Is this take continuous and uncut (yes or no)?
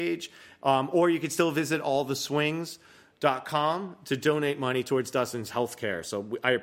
yes